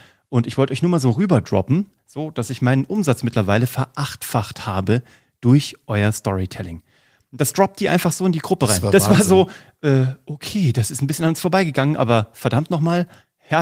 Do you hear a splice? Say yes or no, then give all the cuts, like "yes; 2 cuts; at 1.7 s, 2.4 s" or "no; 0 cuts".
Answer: no; 0 cuts